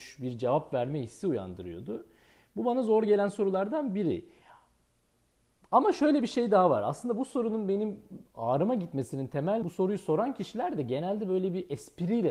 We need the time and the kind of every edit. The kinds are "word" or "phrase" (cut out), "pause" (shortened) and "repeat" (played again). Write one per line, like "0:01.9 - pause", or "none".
0:09.6 - word

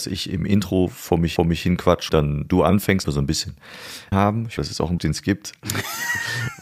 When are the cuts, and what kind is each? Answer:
0:01.4 - repeat
0:02.1 - word
0:03.0 - word
0:04.1 - phrase
0:04.6 - word
0:05.0 - word

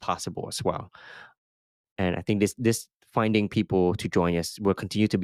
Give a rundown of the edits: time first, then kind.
none

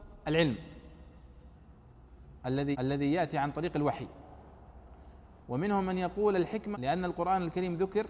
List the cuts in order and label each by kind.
0:02.7 - repeat
0:06.7 - word

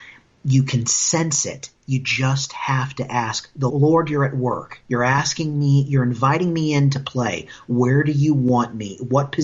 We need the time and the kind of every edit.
0:01.8 - pause
0:03.7 - word
0:04.8 - pause

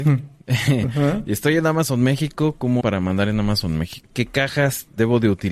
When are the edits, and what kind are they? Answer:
0:02.8 - word

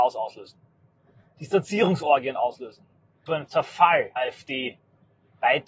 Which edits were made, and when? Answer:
0:03.3 - phrase
0:04.2 - word

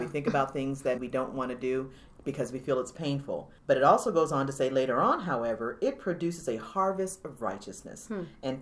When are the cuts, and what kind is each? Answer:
0:01.0 - word
0:03.6 - pause

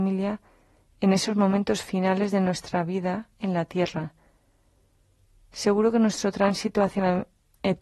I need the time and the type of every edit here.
none

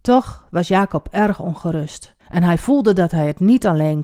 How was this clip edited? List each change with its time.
0:02.2 - pause

